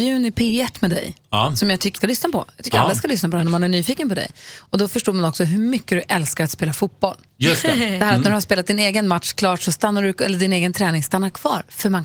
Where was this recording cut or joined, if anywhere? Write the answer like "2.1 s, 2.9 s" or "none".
2.0 s